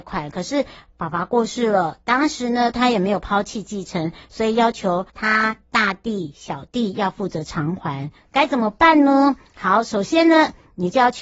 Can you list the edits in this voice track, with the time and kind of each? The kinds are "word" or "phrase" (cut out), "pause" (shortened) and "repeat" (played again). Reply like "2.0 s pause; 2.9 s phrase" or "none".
5.1 s pause